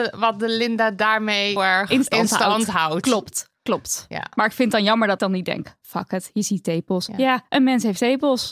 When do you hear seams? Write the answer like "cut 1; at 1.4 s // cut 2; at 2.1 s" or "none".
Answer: cut 1; at 1.6 s // cut 2; at 5.2 s